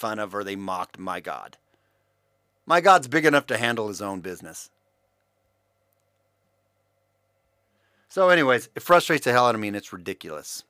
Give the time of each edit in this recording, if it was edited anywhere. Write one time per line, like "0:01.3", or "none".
none